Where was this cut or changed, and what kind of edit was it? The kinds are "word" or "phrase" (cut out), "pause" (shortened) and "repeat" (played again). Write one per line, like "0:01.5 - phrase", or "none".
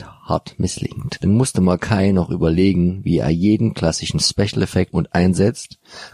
0:04.9 - phrase